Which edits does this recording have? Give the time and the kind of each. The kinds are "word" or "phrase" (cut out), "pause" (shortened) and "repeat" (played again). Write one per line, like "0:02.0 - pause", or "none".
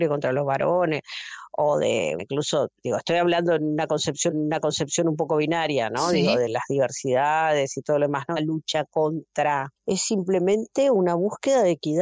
0:02.2 - word
0:04.3 - repeat
0:08.4 - phrase
0:09.8 - pause